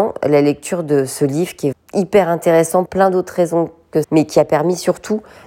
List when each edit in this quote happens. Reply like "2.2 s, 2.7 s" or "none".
1.7 s, 2.9 s, 4.0 s